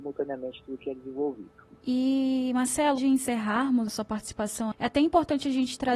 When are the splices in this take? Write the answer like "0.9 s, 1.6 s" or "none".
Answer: 1.8 s, 3.0 s, 3.9 s, 4.7 s